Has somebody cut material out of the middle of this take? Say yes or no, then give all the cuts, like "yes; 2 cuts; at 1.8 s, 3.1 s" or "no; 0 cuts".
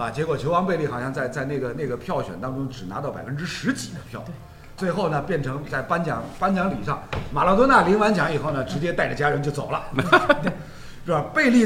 yes; 1 cut; at 4.8 s